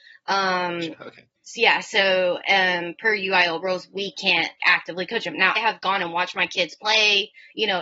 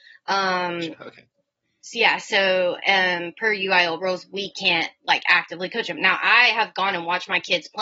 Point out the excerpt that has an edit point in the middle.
first; 3 cuts; at 1.4 s, 4.6 s, 5.6 s

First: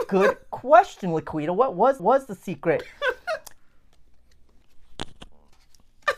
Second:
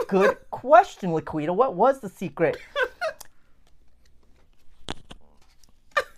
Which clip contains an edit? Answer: first; 2 cuts; at 2.0 s, 4.6 s

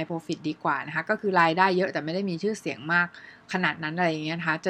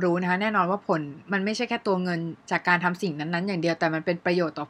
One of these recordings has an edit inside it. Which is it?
second; 1 cut; at 2.4 s

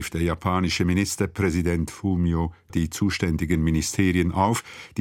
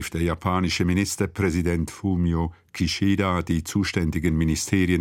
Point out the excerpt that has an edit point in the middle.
first; 1 cut; at 2.7 s

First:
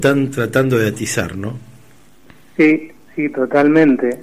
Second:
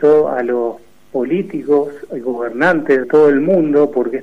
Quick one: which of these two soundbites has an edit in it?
second; 1 cut; at 3.0 s

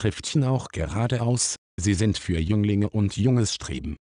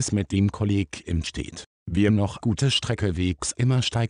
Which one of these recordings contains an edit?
second; 3 cuts; at 1.2 s, 2.1 s, 2.4 s

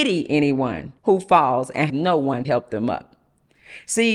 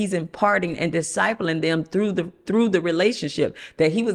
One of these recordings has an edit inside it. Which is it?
first; 3 cuts; at 1.0 s, 1.9 s, 2.4 s

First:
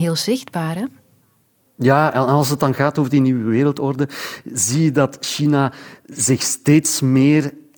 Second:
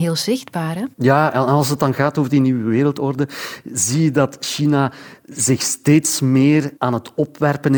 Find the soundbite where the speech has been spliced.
second; 2 cuts; at 0.9 s, 6.8 s

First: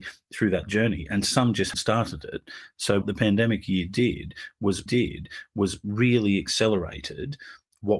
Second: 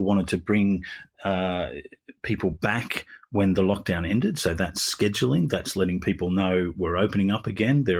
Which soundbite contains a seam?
first; 3 cuts; at 1.7 s, 3.0 s, 4.9 s

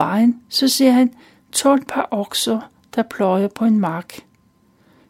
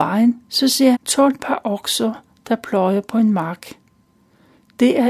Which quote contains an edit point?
second; 1 cut; at 0.9 s

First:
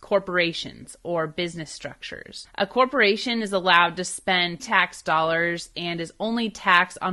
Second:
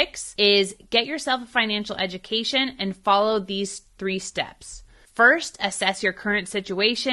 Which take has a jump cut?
first; 1 cut; at 4.6 s

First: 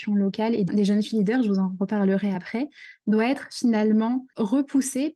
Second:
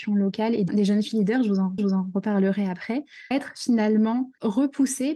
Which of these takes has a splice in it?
second; 2 cuts; at 1.8 s, 3.3 s

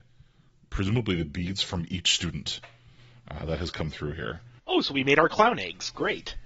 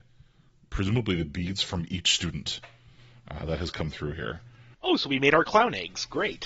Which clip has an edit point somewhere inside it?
first; 1 cut; at 4.6 s

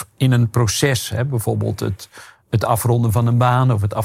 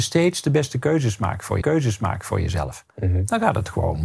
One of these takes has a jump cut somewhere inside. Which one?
second; 1 cut; at 1.6 s

